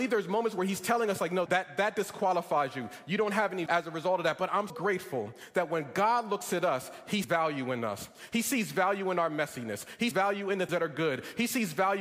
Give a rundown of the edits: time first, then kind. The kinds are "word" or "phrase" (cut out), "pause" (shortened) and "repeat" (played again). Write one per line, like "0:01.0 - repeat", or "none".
0:01.5 - word
0:03.7 - word
0:04.7 - word
0:07.2 - word
0:10.1 - word
0:10.7 - word